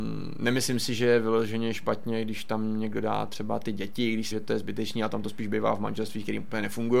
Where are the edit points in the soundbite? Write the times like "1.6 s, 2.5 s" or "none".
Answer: 4.3 s